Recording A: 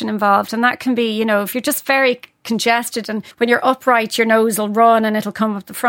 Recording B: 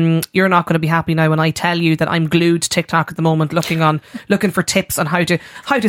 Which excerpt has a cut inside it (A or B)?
A